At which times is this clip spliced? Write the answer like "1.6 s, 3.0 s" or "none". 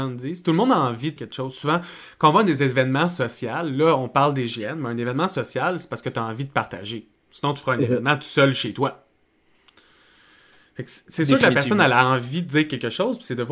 1.2 s